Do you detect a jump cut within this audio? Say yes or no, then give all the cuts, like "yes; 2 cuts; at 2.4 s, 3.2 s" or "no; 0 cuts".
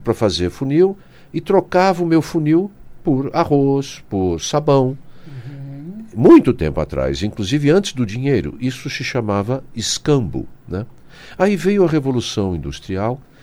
no; 0 cuts